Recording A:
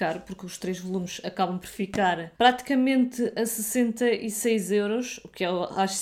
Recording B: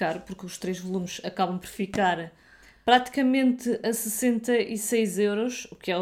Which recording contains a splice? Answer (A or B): A